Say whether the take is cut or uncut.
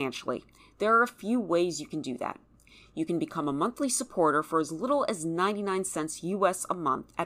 uncut